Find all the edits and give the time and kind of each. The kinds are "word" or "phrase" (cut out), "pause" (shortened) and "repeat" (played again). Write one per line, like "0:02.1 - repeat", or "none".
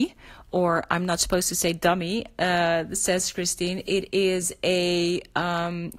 none